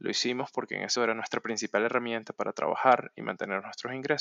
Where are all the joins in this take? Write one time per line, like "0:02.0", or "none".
0:01.0